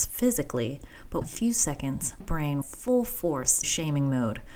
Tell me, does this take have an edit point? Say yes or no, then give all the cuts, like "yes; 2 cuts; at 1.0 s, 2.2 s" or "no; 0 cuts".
yes; 4 cuts; at 1.2 s, 2.2 s, 2.6 s, 3.6 s